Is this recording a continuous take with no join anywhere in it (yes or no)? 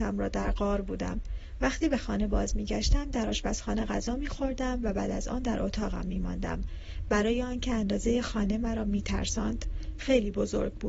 yes